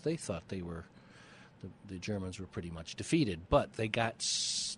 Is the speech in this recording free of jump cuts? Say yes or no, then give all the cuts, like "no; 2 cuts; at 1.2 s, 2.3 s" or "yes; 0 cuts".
yes; 0 cuts